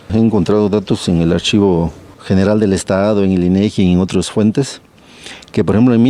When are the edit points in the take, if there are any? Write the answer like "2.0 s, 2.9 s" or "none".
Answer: none